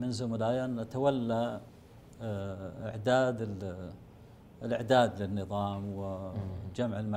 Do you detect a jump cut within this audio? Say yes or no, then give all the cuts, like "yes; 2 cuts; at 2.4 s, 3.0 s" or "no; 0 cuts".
no; 0 cuts